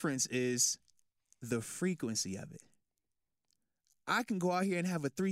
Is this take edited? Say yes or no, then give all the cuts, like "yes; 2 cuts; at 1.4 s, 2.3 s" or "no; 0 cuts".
no; 0 cuts